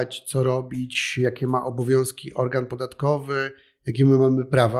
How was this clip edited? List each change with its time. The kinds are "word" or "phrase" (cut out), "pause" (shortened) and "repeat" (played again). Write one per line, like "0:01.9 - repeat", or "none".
none